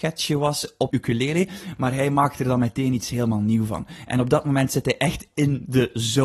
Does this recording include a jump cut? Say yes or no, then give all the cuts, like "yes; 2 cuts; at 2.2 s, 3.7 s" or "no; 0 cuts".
yes; 1 cut; at 0.9 s